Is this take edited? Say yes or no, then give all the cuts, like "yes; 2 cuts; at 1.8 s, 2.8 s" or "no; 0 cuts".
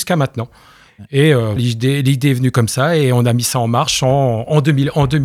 yes; 1 cut; at 1.6 s